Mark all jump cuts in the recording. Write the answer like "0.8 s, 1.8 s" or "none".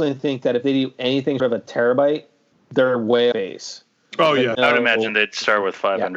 1.4 s, 2.5 s, 3.3 s, 4.5 s